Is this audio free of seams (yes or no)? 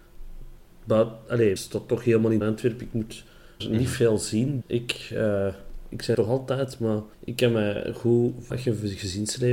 no